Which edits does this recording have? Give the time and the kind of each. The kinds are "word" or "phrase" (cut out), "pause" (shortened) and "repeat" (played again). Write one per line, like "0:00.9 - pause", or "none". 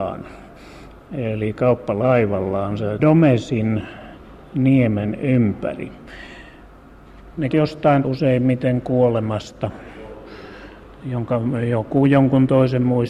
0:03.0 - word
0:07.5 - word
0:08.0 - word